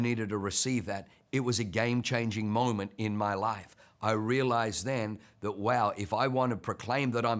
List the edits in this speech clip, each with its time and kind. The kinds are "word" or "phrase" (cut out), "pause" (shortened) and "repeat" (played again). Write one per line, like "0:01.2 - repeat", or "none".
none